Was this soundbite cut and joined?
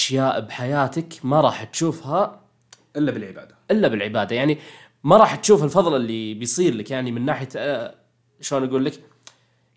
no; 0 cuts

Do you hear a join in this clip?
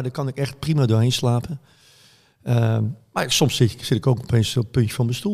no; 0 cuts

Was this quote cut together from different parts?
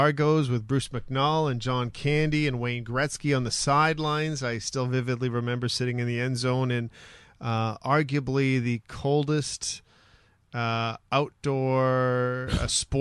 no; 0 cuts

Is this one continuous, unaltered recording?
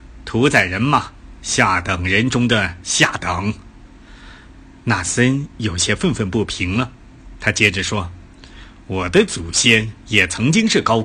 yes; 0 cuts

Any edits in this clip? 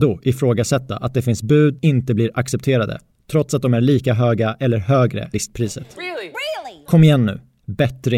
yes; 3 cuts; at 1.8 s, 5.3 s, 6.0 s

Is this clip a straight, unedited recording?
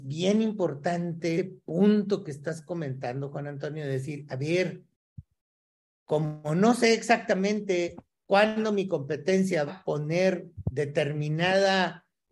no; 2 cuts; at 1.4 s, 9.7 s

